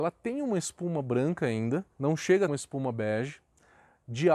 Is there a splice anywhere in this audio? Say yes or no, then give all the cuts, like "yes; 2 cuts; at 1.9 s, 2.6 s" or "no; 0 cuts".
yes; 2 cuts; at 1.9 s, 2.5 s